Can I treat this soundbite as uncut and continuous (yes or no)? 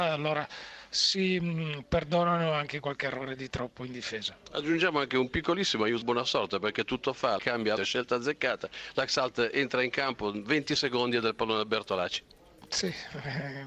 no